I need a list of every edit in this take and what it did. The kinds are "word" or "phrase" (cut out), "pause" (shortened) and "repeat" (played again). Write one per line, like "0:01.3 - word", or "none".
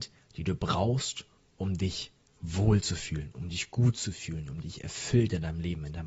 none